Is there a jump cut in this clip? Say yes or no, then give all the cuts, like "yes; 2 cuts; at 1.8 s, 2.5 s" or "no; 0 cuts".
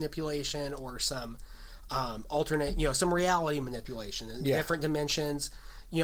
no; 0 cuts